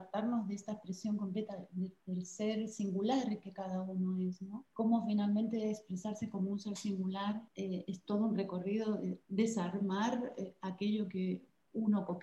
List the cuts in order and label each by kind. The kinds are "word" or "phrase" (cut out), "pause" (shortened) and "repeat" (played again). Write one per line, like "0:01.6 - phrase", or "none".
0:04.7 - pause
0:07.5 - pause
0:09.2 - pause